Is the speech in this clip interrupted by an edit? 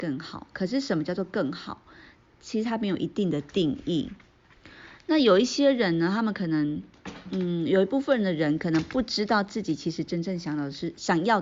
no; 0 cuts

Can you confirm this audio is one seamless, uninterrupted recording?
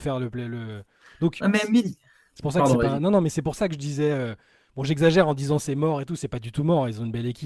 yes; 0 cuts

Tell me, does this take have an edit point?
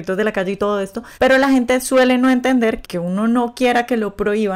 yes; 2 cuts; at 1.1 s, 2.8 s

